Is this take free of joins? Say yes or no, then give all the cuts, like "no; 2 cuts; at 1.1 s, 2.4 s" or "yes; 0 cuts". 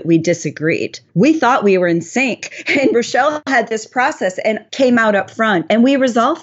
no; 2 cuts; at 1.1 s, 4.7 s